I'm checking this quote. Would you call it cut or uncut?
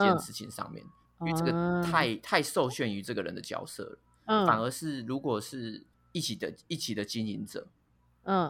cut